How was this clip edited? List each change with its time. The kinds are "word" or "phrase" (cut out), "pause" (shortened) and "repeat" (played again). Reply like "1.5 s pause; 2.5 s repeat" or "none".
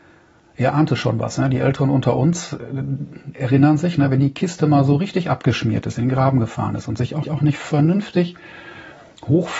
7.2 s repeat